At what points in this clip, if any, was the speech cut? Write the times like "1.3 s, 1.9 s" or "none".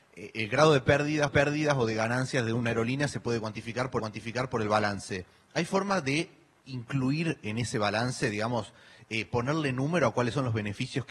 1.3 s, 4.0 s